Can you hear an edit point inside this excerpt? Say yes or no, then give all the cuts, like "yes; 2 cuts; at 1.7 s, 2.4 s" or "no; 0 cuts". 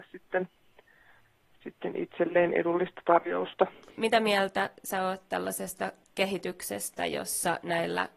no; 0 cuts